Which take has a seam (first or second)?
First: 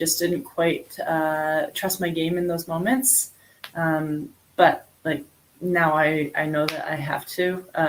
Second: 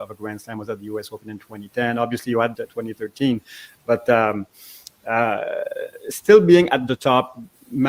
second